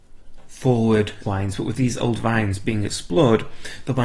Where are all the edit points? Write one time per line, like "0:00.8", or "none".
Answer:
0:01.2